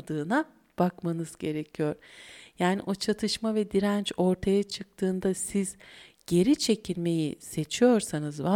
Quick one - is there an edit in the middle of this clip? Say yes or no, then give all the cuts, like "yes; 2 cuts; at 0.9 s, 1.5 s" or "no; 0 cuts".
no; 0 cuts